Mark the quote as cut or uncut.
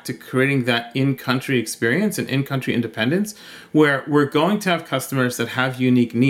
uncut